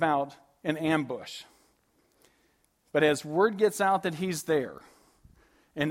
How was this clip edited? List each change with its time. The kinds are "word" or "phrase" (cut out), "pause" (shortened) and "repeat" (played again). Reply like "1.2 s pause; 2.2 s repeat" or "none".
none